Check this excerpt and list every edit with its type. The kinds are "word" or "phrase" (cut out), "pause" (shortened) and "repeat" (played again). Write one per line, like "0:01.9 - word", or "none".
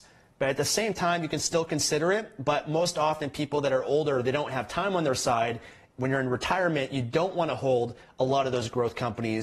none